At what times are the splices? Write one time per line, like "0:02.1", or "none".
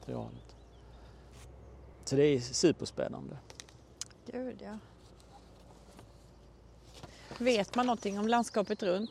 0:01.9